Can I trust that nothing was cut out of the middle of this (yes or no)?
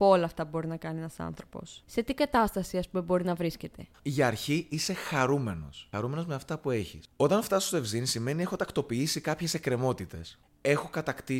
no